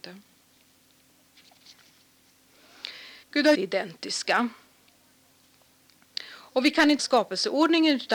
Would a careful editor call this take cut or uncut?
cut